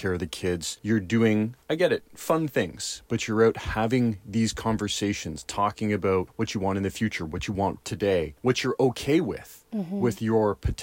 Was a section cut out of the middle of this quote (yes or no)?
no